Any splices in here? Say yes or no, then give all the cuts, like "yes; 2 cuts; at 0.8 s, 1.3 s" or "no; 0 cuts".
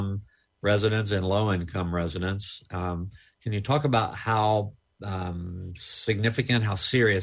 no; 0 cuts